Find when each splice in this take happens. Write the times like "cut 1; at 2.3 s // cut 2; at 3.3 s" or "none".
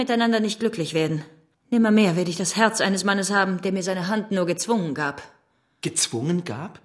cut 1; at 1.5 s